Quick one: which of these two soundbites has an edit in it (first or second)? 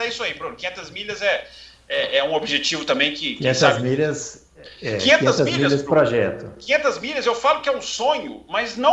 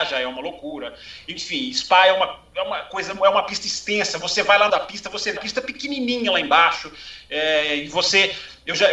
second